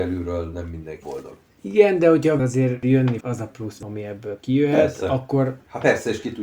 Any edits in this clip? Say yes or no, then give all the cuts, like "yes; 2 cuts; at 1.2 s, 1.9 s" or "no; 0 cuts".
yes; 4 cuts; at 1.0 s, 2.4 s, 3.2 s, 3.8 s